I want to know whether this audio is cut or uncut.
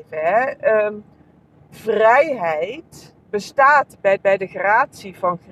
cut